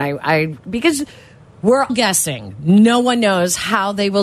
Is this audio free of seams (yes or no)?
no